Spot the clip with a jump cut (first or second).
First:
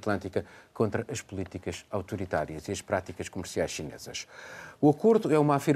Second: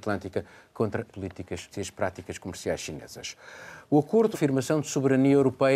second